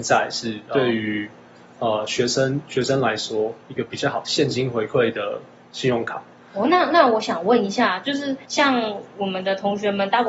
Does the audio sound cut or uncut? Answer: cut